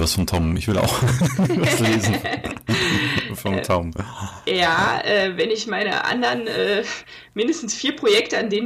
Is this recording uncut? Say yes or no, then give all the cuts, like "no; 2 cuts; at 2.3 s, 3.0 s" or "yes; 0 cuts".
yes; 0 cuts